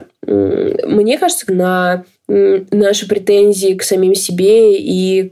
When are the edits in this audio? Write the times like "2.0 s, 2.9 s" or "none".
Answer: 1.5 s, 2.1 s